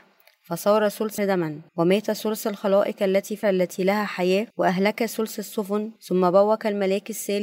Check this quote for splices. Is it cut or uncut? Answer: cut